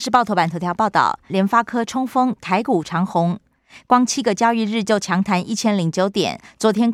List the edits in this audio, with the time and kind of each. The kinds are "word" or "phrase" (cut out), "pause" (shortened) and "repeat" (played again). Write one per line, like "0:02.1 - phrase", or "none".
0:01.3 - phrase